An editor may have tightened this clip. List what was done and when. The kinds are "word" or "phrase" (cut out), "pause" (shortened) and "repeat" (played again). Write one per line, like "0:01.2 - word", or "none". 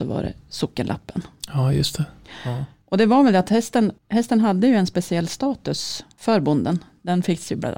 0:02.8 - pause
0:04.0 - pause